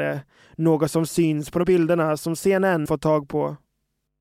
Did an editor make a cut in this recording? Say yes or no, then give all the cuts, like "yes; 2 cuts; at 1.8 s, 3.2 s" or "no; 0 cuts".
yes; 2 cuts; at 1.6 s, 2.9 s